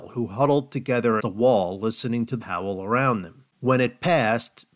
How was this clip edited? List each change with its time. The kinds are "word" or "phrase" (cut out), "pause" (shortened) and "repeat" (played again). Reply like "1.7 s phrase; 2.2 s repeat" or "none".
1.2 s word; 2.4 s word; 3.5 s pause